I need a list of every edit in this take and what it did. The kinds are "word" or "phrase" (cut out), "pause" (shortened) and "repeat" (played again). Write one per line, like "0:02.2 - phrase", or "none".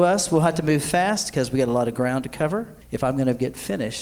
0:02.8 - pause